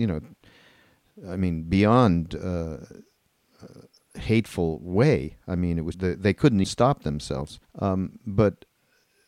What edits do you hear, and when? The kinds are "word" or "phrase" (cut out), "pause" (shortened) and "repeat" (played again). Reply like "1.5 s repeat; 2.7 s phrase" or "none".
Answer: 5.9 s phrase; 6.6 s word; 7.6 s pause